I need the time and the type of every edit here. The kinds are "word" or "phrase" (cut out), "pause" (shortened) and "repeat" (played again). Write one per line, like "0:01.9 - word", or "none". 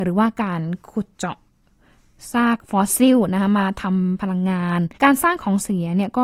0:04.9 - pause